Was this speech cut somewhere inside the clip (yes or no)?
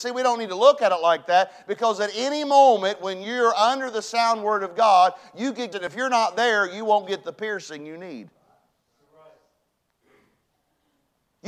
yes